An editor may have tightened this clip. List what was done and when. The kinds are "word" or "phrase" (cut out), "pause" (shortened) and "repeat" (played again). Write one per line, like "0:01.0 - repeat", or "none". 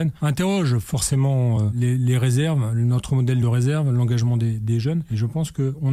none